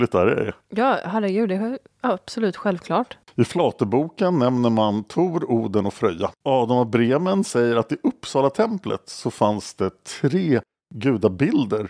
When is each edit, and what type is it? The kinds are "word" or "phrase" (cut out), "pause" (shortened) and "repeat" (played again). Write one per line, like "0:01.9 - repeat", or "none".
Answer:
0:06.4 - pause